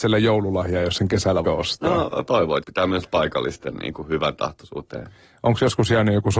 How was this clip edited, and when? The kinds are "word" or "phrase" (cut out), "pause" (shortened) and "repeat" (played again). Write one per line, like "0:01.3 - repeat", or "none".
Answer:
0:01.4 - word
0:02.3 - word
0:02.6 - word
0:03.0 - word